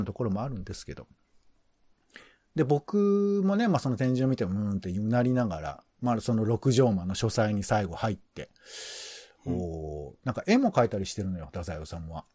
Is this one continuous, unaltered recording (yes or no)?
yes